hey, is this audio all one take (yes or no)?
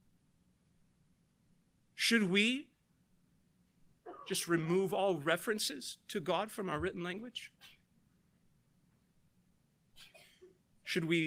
yes